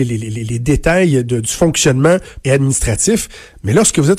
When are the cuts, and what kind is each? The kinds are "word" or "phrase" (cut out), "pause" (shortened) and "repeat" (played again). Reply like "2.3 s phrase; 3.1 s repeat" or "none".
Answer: 2.4 s word